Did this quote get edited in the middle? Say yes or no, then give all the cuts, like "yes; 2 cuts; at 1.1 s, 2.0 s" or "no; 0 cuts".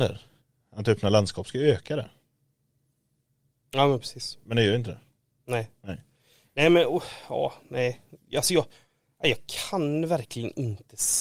no; 0 cuts